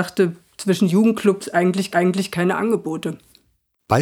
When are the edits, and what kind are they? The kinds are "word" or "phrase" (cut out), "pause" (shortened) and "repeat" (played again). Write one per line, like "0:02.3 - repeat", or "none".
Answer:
0:01.4 - phrase
0:01.9 - repeat